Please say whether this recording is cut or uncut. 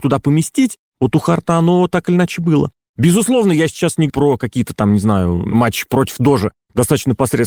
cut